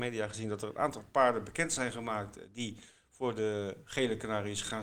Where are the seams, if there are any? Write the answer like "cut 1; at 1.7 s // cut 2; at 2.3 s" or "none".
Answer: none